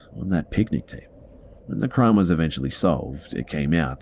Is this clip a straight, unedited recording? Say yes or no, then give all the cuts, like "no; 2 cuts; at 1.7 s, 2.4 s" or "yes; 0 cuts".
no; 1 cut; at 1.6 s